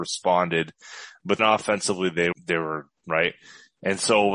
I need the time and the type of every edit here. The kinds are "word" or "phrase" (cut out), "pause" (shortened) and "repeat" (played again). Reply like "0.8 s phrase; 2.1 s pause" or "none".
1.4 s word; 2.3 s word; 3.0 s word